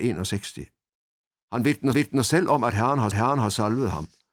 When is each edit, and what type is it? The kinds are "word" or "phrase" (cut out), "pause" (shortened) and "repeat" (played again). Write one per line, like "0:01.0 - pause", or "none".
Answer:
0:01.9 - repeat
0:03.1 - repeat